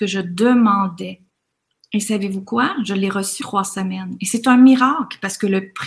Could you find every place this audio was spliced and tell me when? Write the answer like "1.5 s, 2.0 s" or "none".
3.4 s